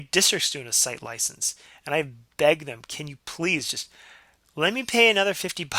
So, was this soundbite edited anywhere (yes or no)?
no